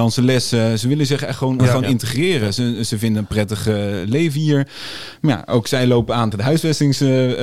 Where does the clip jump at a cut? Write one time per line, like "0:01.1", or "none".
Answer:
0:01.6
0:06.3